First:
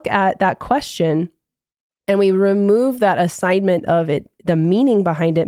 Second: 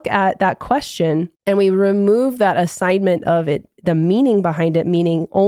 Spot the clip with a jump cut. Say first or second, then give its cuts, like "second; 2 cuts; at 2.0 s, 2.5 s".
second; 1 cut; at 1.4 s